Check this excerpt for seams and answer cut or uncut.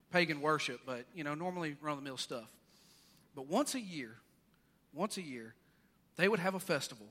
uncut